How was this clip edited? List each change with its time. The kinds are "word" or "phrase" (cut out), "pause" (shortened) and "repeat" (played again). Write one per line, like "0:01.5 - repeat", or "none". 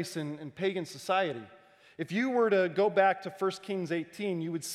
none